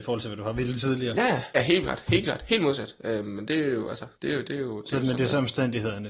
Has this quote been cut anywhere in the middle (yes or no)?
yes